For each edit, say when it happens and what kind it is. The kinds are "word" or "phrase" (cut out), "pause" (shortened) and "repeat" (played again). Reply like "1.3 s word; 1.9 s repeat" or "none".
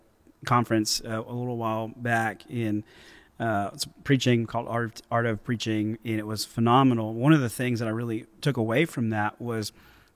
none